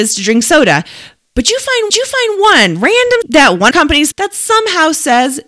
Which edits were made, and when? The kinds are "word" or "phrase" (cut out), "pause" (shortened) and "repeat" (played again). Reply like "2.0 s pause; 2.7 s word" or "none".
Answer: 1.9 s repeat; 3.2 s word; 3.7 s phrase; 4.1 s word